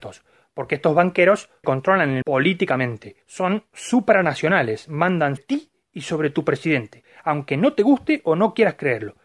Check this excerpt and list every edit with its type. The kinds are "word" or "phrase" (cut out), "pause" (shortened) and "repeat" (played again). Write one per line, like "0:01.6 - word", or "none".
0:01.6 - phrase
0:02.2 - word
0:03.2 - pause
0:05.4 - word